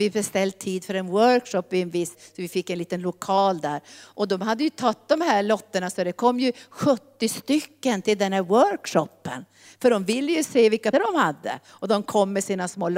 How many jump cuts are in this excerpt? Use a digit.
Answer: 2